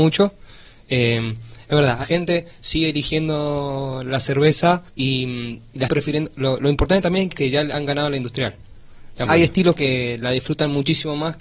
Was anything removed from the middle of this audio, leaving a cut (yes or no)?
yes